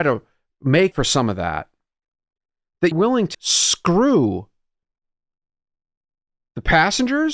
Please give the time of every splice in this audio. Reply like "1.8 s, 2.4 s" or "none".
0.9 s, 2.9 s, 3.3 s